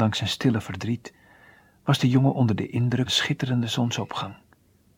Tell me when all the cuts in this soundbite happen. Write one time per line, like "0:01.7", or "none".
0:03.1